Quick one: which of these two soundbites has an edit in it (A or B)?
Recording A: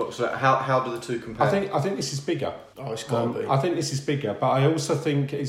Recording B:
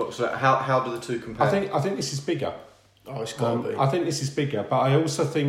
A